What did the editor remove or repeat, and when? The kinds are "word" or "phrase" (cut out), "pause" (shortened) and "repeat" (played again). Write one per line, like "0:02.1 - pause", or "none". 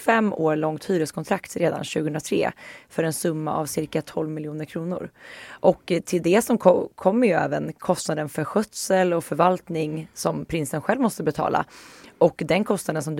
none